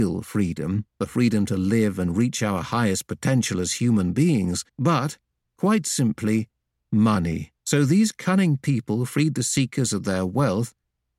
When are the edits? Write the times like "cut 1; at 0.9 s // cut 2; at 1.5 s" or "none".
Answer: cut 1; at 0.9 s // cut 2; at 4.7 s // cut 3; at 7.6 s